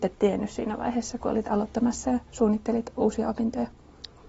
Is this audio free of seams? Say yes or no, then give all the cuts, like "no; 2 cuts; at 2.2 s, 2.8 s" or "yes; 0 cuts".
yes; 0 cuts